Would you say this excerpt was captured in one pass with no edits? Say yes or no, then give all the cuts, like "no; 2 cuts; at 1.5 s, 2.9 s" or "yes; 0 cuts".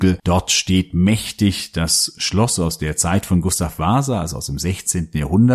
yes; 0 cuts